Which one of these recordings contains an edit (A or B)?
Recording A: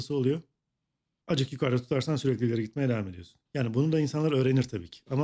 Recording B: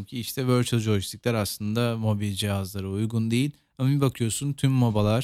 A